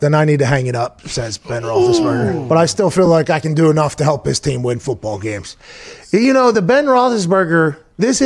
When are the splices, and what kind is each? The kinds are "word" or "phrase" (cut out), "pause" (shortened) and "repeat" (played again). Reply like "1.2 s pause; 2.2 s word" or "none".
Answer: none